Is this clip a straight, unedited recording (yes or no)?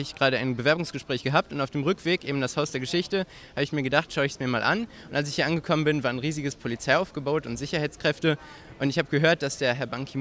no